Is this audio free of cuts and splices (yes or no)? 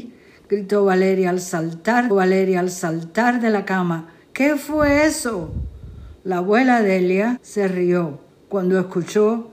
no